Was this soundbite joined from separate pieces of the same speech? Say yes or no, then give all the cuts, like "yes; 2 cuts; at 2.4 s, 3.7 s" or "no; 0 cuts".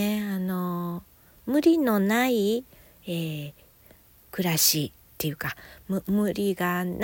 no; 0 cuts